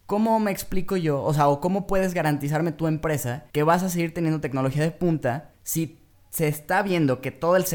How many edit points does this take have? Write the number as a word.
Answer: two